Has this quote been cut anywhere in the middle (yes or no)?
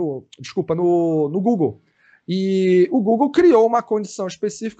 no